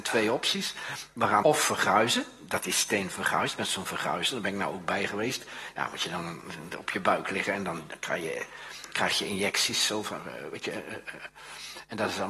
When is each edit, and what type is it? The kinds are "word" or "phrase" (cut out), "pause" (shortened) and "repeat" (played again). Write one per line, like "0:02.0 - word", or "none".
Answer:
0:01.4 - word